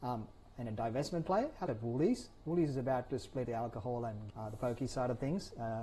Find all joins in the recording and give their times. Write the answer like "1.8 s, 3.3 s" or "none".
1.7 s, 3.4 s, 4.3 s

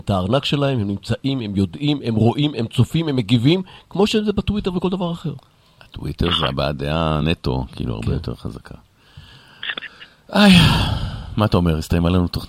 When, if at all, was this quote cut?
none

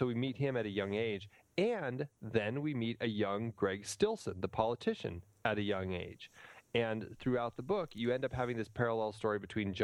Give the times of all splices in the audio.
none

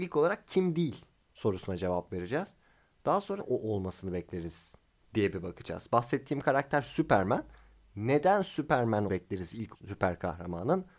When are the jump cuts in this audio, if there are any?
3.4 s, 9.1 s, 9.7 s

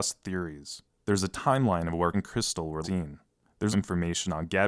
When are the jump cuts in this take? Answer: 2.1 s, 2.8 s, 3.7 s

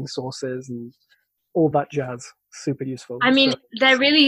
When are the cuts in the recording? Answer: none

